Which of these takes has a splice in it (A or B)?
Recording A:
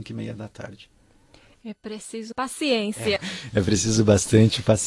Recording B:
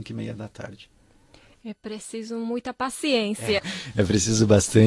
A